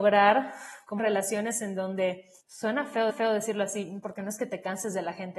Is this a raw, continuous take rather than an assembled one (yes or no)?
no